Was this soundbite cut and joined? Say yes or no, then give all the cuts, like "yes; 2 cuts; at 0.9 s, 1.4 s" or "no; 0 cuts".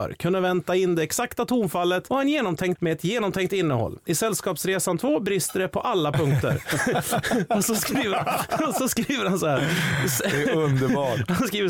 yes; 2 cuts; at 2.1 s, 2.8 s